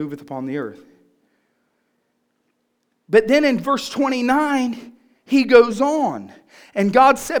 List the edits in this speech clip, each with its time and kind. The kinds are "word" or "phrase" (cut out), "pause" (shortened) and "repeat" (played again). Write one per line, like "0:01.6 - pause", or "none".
none